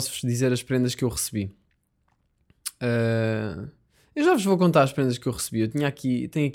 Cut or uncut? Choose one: uncut